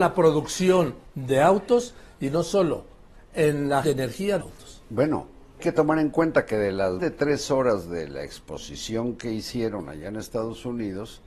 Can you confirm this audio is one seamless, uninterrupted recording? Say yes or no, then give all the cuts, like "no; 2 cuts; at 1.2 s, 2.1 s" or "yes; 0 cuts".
no; 4 cuts; at 3.8 s, 4.4 s, 5.6 s, 7.0 s